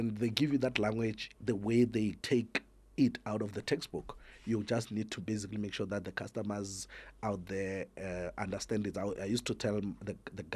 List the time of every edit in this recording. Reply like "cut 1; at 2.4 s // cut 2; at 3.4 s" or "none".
cut 1; at 1.4 s // cut 2; at 2.2 s